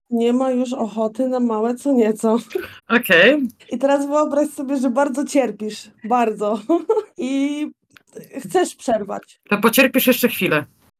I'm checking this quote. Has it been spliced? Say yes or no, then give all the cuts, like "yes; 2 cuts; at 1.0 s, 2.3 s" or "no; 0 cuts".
yes; 3 cuts; at 2.8 s, 3.6 s, 7.1 s